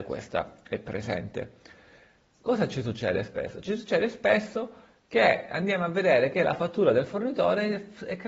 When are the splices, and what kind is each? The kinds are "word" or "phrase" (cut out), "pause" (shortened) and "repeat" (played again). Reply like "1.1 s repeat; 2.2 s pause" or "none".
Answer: none